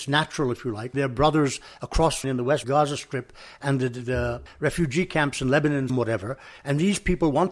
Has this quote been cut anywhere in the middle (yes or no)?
yes